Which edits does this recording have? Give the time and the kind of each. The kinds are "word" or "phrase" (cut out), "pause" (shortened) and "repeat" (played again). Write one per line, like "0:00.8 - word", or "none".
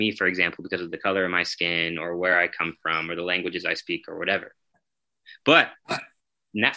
none